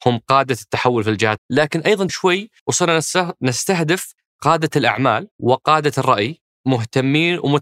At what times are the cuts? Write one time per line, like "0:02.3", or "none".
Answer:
0:01.4
0:02.1
0:02.6
0:05.3
0:06.6